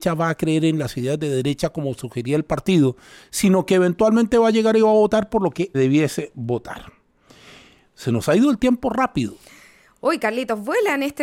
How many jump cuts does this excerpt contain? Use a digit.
1